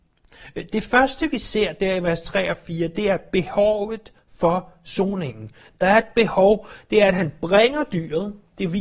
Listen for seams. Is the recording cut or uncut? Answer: uncut